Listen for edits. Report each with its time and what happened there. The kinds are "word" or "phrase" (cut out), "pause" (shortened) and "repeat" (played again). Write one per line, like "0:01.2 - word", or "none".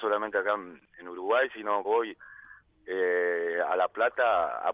0:01.8 - word